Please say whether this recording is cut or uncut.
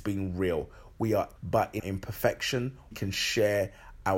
cut